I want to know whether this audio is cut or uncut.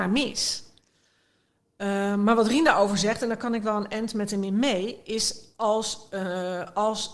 uncut